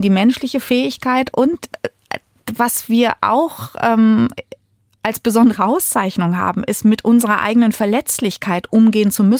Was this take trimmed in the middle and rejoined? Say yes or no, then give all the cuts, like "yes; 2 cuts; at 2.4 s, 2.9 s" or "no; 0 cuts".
no; 0 cuts